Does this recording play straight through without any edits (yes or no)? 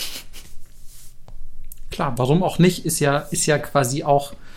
yes